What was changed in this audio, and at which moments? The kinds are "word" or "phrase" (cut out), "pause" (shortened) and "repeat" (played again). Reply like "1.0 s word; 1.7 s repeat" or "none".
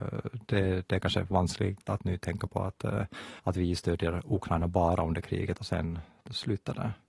3.4 s pause